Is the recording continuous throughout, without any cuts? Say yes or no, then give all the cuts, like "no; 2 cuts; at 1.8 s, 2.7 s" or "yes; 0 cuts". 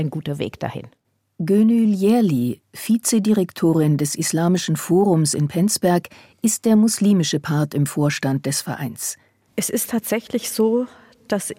yes; 0 cuts